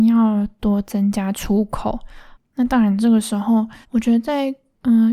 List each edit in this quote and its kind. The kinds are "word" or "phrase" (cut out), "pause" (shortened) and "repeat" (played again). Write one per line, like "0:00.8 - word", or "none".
0:02.3 - pause
0:03.8 - pause